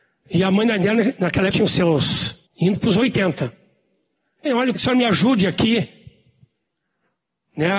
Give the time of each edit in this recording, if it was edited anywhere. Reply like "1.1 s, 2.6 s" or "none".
1.5 s, 2.5 s, 4.5 s, 4.8 s